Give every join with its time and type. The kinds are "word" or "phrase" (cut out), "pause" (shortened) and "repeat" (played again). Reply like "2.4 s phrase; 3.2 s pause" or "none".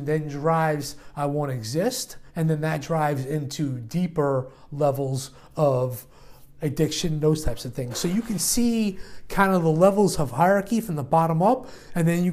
2.3 s pause